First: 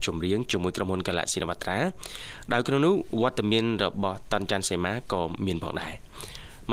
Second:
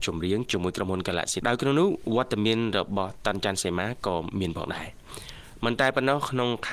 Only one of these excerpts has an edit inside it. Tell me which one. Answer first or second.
second